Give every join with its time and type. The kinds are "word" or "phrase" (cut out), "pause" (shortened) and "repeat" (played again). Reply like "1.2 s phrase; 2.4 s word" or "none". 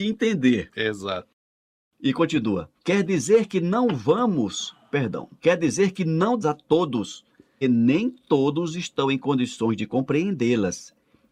2.8 s pause; 6.4 s phrase; 7.6 s word